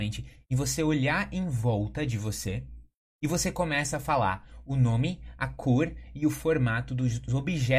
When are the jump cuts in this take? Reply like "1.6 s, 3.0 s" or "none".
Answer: 3.1 s

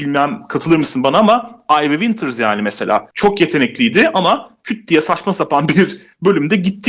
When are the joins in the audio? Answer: 3.1 s

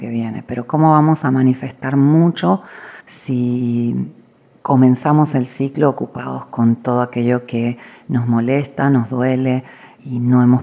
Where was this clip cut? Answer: 3.0 s

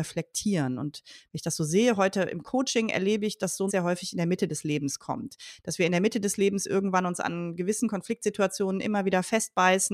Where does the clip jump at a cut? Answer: 3.7 s

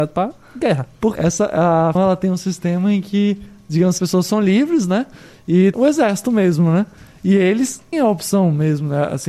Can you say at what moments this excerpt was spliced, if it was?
1.2 s, 2.0 s, 4.0 s, 5.7 s, 7.9 s

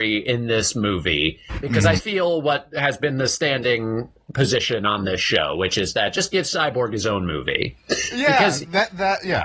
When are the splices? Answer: 2.0 s

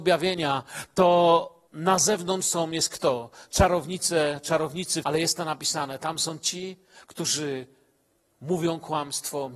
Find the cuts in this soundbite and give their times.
1.7 s, 5.0 s

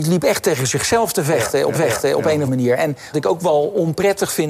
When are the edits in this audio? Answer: 1.7 s, 2.5 s, 3.1 s

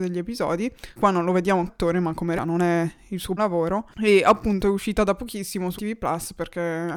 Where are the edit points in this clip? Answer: 1.0 s, 1.7 s, 2.4 s, 3.4 s, 5.8 s

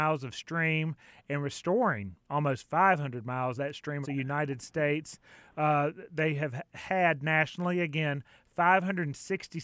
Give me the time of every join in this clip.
3.6 s, 4.0 s

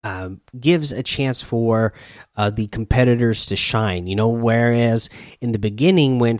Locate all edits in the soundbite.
none

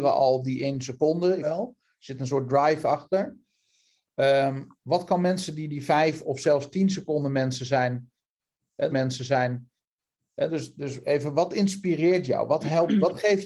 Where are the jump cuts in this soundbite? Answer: 1.4 s, 8.9 s

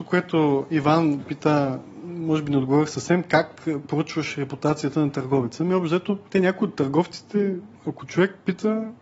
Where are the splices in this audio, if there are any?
none

